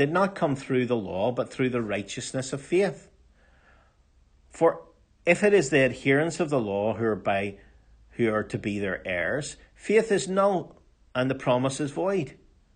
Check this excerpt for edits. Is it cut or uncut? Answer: uncut